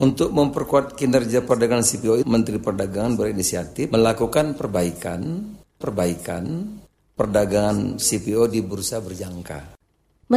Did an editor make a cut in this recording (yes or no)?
yes